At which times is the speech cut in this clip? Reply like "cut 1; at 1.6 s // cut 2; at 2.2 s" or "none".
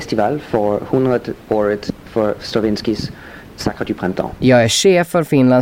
none